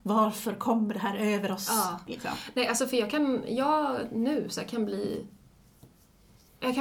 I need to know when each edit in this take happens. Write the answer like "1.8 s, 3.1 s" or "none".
none